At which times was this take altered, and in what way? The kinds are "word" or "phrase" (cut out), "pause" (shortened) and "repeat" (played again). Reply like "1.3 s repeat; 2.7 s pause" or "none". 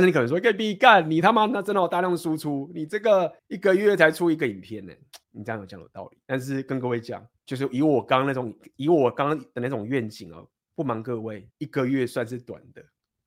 3.4 s pause; 5.2 s pause; 6.2 s pause; 7.3 s pause; 11.5 s pause